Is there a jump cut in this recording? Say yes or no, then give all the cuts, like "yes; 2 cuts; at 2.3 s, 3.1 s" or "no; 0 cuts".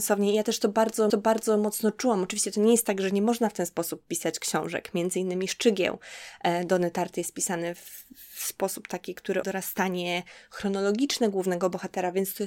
yes; 2 cuts; at 1.1 s, 9.4 s